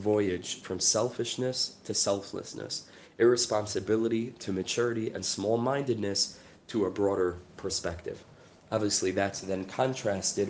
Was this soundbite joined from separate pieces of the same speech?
no; 0 cuts

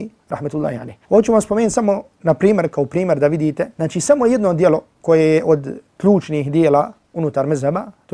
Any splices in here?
yes; 3 cuts; at 1.0 s, 3.7 s, 4.9 s

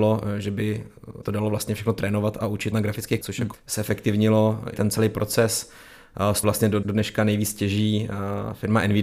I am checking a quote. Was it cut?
yes; 7 cuts; at 1.2 s, 2.7 s, 3.2 s, 3.5 s, 4.7 s, 6.4 s, 6.8 s

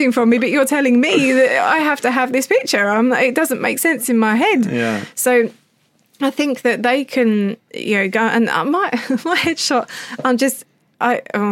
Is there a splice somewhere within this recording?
no; 0 cuts

